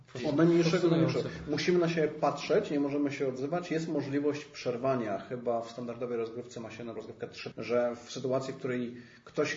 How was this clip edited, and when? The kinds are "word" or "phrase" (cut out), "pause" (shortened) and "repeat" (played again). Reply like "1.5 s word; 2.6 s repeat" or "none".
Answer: 7.0 s word; 7.5 s phrase

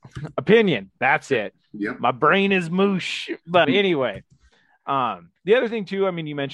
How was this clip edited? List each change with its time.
3.6 s word

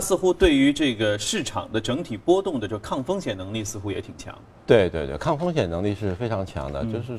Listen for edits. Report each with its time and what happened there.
none

